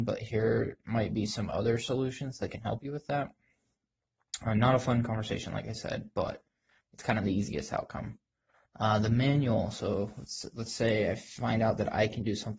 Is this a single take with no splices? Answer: yes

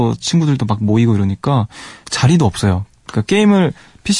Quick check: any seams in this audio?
no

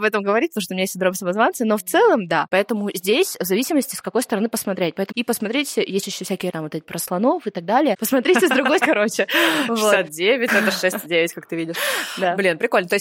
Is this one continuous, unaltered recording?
no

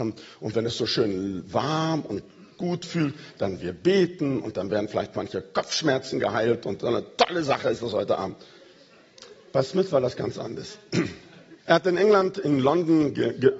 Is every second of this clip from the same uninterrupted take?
no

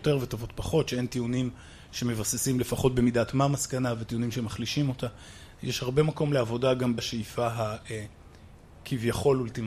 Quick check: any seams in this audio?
yes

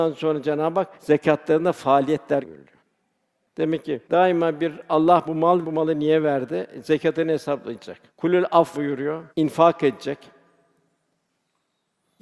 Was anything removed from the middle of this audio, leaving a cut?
yes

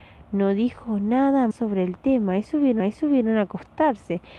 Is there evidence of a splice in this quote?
yes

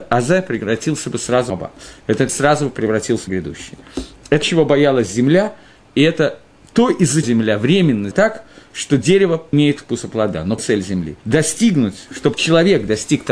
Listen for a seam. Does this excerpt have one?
yes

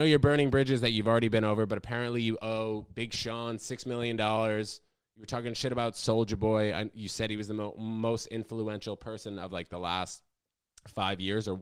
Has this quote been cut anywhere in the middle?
no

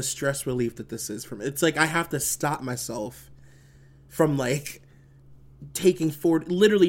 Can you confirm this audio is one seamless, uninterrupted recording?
yes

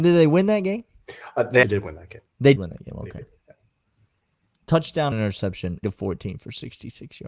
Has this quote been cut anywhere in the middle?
yes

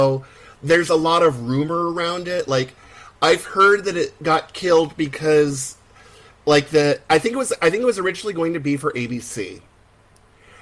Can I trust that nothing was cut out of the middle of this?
yes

